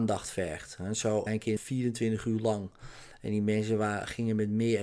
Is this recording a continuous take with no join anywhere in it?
no; 2 cuts; at 1.3 s, 1.6 s

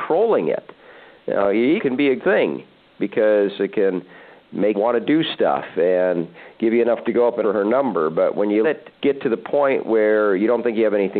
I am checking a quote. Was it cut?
yes; 6 cuts; at 1.8 s, 2.2 s, 4.7 s, 7.0 s, 7.4 s, 8.6 s

